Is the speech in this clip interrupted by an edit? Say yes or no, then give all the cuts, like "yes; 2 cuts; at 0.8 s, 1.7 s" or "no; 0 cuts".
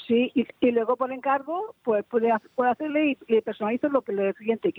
no; 0 cuts